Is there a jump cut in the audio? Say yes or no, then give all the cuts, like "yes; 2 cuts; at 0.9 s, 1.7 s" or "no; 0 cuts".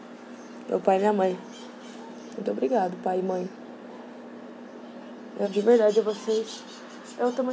yes; 1 cut; at 5.4 s